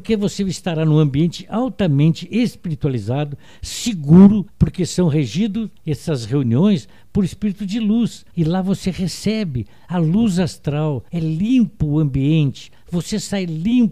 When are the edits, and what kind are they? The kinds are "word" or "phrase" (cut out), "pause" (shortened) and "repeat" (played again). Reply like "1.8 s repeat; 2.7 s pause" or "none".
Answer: 4.5 s pause; 5.8 s pause; 8.3 s pause; 11.1 s pause